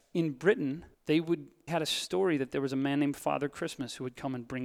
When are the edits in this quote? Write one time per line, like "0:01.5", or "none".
0:00.9
0:01.7